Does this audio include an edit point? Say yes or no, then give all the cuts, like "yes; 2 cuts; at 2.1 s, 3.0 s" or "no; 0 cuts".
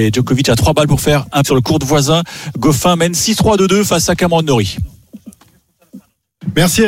yes; 1 cut; at 1.4 s